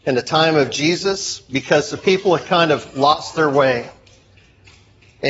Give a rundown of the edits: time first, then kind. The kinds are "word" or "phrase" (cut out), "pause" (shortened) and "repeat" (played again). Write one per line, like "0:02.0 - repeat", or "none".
none